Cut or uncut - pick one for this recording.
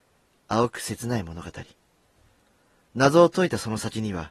uncut